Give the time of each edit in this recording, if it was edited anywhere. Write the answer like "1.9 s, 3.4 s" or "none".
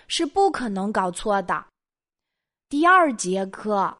none

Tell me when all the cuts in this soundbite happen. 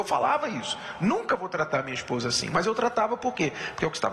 none

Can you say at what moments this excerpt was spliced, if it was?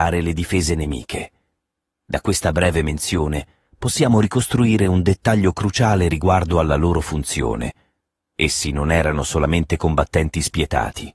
none

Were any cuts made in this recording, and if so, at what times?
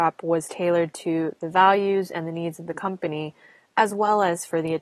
none

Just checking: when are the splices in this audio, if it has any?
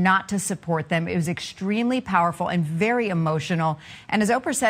none

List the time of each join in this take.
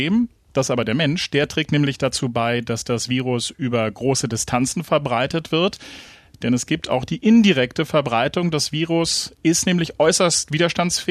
none

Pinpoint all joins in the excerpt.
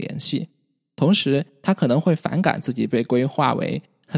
none

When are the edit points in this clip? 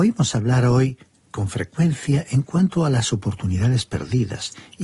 none

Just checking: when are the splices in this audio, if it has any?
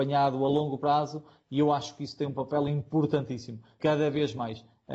3.8 s

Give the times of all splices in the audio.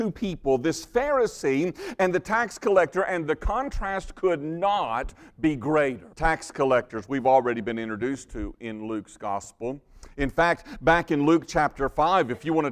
6.1 s

